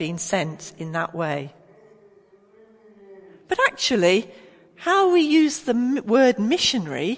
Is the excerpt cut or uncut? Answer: uncut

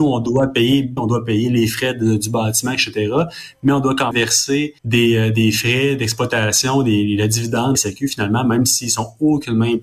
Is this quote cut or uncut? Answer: cut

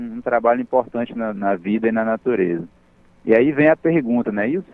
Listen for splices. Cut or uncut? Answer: uncut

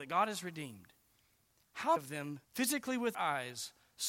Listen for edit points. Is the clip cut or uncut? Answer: cut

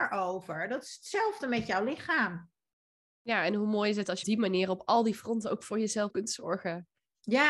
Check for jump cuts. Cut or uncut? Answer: cut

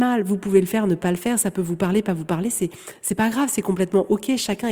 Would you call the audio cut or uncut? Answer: uncut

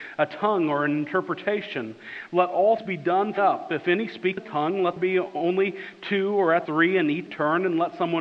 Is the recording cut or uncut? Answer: cut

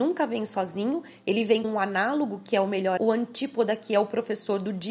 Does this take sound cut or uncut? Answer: cut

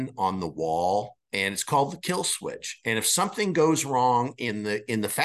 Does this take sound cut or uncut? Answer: cut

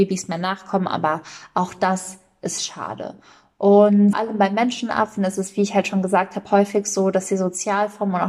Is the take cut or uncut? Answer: cut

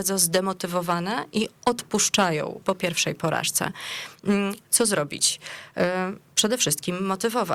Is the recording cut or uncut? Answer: cut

